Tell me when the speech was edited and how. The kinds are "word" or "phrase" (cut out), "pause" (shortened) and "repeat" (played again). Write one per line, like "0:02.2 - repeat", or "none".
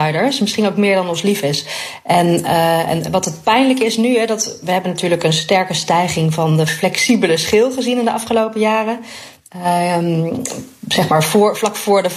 none